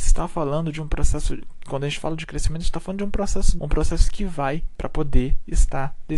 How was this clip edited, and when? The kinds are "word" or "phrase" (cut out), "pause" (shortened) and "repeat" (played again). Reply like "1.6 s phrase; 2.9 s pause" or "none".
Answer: 3.6 s word; 4.8 s word